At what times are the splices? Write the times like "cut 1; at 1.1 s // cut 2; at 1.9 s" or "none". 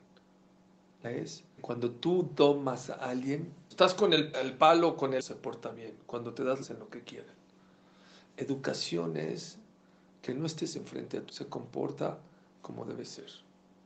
cut 1; at 1.0 s // cut 2; at 1.6 s // cut 3; at 3.7 s // cut 4; at 4.3 s // cut 5; at 5.2 s // cut 6; at 6.6 s // cut 7; at 10.3 s // cut 8; at 11.3 s